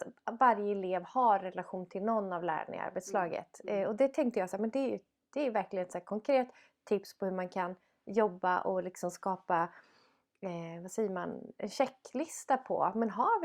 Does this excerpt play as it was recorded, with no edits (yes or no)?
yes